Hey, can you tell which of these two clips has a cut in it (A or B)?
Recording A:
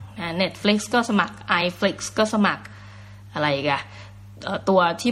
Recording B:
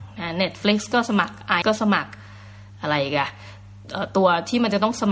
B